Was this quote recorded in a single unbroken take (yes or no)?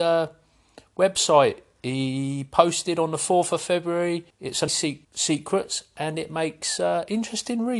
no